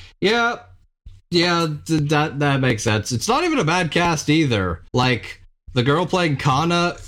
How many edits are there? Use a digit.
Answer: 1